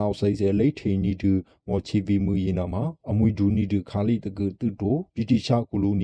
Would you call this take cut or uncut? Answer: uncut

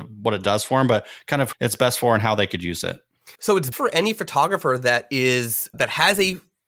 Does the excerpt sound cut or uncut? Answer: cut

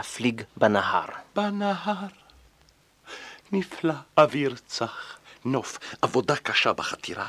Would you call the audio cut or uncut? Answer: cut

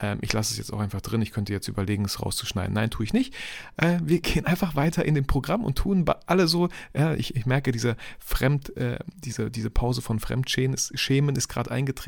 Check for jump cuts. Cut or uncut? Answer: uncut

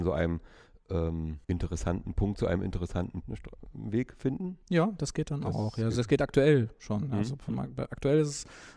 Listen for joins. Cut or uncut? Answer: cut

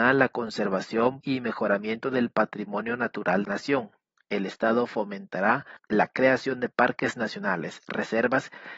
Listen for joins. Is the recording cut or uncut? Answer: cut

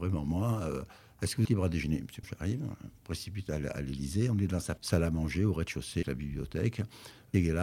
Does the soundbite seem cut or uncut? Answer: cut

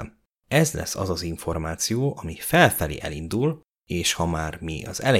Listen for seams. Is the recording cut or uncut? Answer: uncut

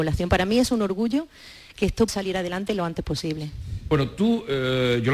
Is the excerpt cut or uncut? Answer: cut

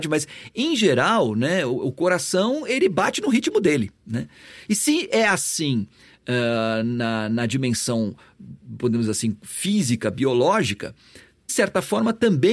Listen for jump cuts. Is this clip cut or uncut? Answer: cut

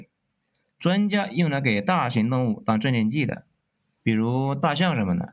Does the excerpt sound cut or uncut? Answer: uncut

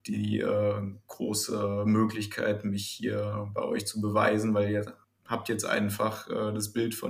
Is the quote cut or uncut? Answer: cut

